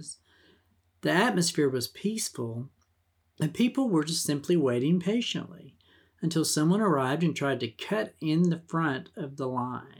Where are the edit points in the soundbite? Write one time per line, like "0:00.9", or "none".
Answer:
none